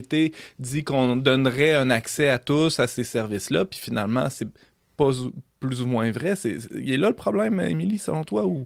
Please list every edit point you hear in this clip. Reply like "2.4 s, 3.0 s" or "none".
none